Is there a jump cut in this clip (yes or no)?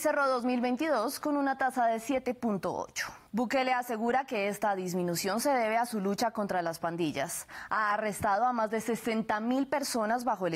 yes